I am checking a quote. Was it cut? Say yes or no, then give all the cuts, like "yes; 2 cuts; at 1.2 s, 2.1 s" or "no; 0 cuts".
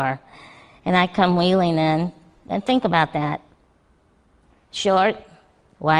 no; 0 cuts